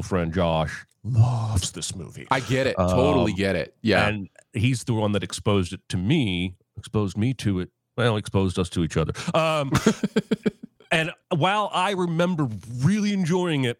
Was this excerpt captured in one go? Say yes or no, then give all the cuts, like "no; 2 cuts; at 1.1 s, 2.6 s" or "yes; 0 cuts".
no; 1 cut; at 1.0 s